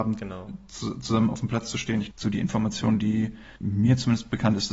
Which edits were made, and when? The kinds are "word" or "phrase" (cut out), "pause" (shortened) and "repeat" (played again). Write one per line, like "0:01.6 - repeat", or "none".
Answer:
0:02.1 - word
0:03.6 - pause